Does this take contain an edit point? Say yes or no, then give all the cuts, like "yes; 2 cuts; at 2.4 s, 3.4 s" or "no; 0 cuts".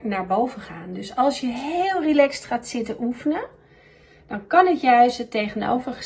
no; 0 cuts